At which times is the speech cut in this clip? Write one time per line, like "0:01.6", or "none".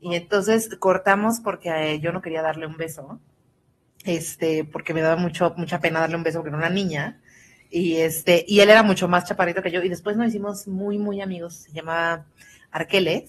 none